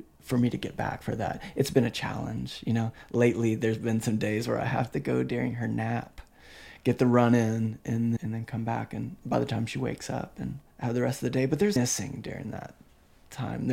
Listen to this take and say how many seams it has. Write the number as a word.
four